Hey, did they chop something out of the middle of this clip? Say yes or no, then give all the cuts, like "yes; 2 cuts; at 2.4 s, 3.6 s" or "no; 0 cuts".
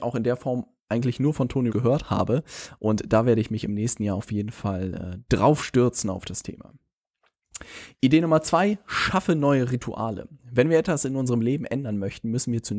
yes; 1 cut; at 1.7 s